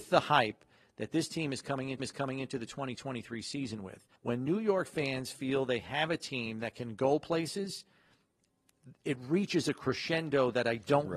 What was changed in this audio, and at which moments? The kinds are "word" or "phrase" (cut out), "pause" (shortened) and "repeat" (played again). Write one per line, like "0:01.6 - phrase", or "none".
0:02.0 - repeat
0:04.2 - pause